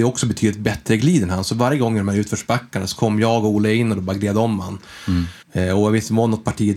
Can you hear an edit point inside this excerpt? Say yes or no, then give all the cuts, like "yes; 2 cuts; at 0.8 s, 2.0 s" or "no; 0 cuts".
yes; 1 cut; at 5.4 s